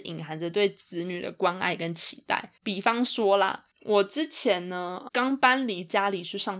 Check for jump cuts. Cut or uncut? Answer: cut